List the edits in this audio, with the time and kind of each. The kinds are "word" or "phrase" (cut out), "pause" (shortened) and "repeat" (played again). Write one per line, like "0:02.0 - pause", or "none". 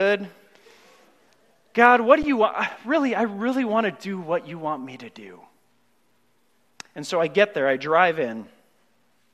none

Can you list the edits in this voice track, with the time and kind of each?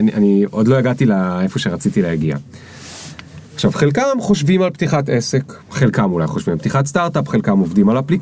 0:03.5 - pause
0:05.6 - pause

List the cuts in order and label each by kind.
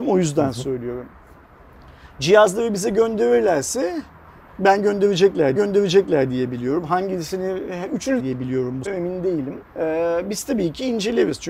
0:05.6 - repeat
0:08.2 - phrase
0:08.9 - word
0:09.7 - pause

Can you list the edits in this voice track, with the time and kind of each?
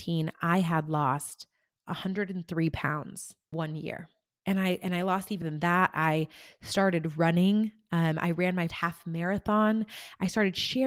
0:03.5 - word
0:05.4 - word
0:08.7 - word

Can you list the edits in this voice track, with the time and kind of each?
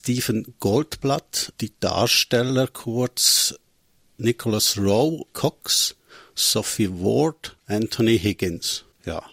0:01.5 - word
0:05.3 - word
0:07.6 - pause

